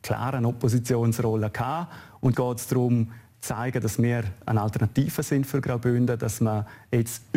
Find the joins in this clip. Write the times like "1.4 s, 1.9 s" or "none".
2.3 s